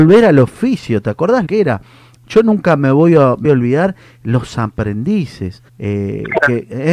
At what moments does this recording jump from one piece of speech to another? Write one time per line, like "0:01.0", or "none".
0:01.5
0:03.4
0:05.7

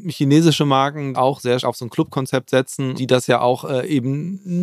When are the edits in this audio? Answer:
0:01.1
0:01.6
0:03.0

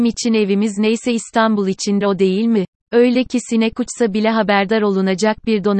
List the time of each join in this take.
0:02.0
0:02.7

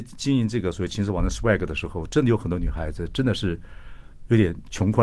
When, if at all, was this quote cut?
none

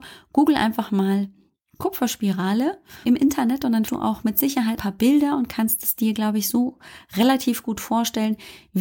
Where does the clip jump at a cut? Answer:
0:03.0
0:03.9
0:04.8

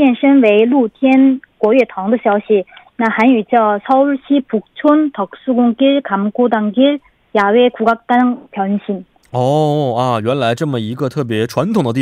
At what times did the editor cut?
none

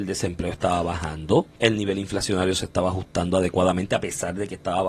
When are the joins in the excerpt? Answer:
0:01.6

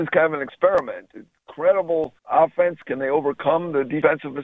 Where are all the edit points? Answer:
0:02.2

